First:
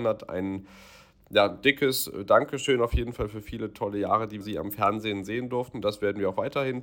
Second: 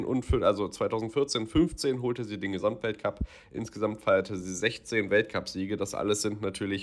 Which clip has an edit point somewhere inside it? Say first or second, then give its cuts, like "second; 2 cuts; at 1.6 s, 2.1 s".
first; 1 cut; at 4.4 s